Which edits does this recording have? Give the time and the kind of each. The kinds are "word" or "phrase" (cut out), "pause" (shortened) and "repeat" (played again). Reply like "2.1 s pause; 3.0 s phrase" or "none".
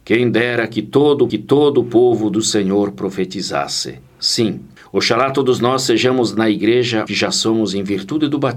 1.3 s repeat; 4.8 s pause; 7.1 s word